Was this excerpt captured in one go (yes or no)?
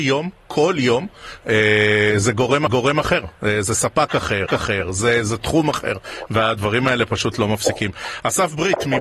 no